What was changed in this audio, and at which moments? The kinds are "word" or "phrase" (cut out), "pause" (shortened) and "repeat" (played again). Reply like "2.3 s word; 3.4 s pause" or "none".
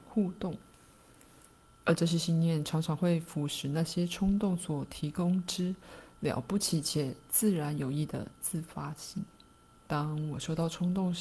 9.7 s pause